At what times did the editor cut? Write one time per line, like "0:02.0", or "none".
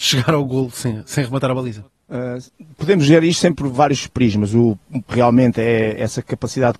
0:01.9
0:05.1